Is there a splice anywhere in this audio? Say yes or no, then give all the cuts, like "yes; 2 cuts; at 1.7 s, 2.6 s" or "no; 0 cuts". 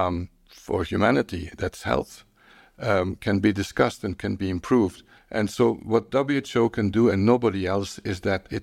yes; 1 cut; at 5.2 s